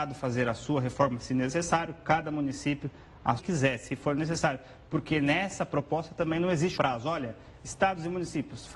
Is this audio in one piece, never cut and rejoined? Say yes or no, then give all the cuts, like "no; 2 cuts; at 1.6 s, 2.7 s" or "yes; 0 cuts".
no; 2 cuts; at 3.4 s, 6.8 s